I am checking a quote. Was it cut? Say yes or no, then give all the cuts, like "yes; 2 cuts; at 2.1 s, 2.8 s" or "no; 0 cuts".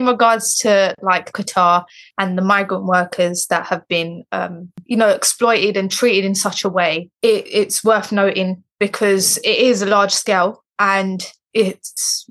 no; 0 cuts